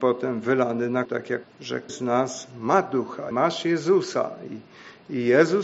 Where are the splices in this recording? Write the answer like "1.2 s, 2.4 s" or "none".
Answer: 1.0 s, 1.4 s, 1.9 s, 3.3 s